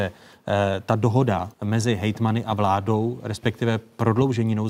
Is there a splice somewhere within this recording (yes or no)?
yes